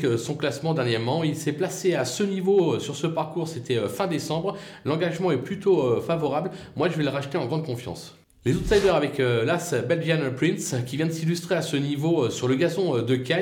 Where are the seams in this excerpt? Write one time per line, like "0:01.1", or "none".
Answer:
none